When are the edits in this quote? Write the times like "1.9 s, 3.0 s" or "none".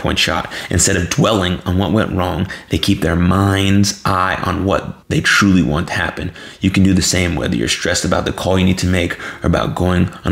5.0 s